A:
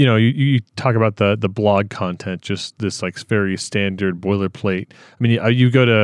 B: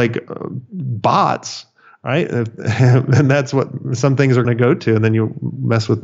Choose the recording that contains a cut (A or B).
B